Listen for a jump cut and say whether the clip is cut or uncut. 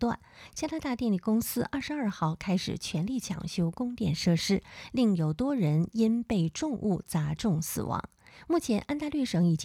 uncut